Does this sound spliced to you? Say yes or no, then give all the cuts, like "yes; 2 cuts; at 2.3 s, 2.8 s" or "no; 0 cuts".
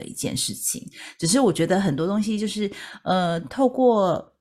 no; 0 cuts